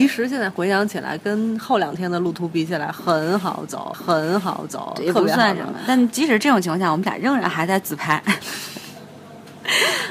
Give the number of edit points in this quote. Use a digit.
1